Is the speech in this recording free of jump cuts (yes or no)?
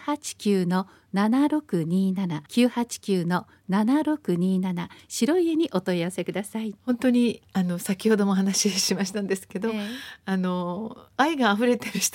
no